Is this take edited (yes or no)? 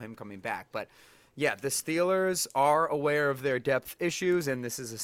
no